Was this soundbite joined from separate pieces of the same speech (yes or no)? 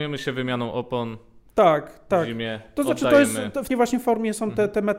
yes